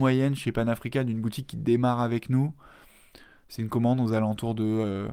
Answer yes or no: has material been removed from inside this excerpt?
no